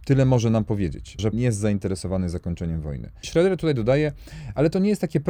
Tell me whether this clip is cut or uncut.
cut